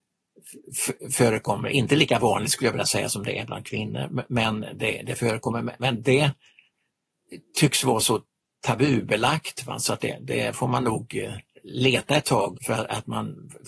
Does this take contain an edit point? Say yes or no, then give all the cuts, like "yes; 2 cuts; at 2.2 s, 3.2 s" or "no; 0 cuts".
yes; 1 cut; at 12.6 s